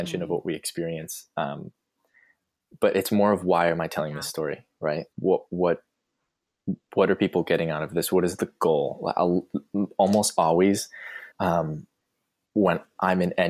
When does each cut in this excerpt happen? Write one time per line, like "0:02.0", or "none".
0:05.1
0:11.3